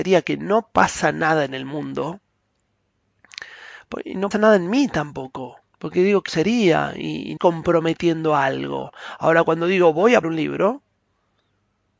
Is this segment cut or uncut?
cut